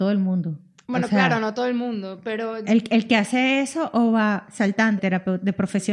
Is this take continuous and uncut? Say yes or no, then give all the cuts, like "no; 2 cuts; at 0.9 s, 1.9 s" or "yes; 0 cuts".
no; 1 cut; at 5.0 s